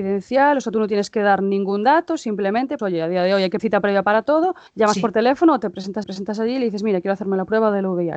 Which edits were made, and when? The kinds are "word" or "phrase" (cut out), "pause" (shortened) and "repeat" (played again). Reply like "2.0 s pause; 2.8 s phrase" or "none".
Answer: 2.8 s word; 3.6 s word; 4.7 s pause; 6.0 s repeat